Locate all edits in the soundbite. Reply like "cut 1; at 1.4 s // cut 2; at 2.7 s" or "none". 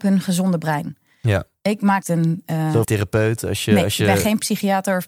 cut 1; at 2.0 s // cut 2; at 2.8 s

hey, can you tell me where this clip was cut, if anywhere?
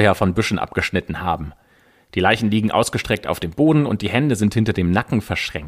none

